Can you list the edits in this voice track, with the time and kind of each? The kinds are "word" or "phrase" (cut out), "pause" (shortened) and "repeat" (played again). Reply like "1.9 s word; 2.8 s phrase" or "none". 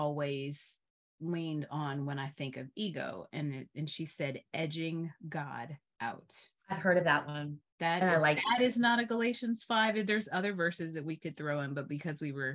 6.6 s pause; 7.7 s pause